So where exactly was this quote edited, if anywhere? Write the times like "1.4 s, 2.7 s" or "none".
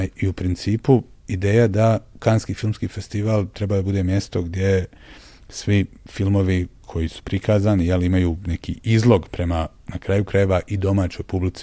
none